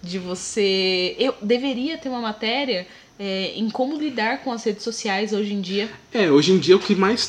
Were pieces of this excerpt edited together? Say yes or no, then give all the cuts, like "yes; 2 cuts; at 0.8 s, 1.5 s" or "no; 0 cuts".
no; 0 cuts